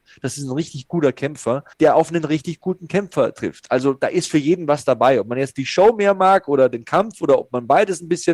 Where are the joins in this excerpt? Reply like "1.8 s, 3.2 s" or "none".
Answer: 1.7 s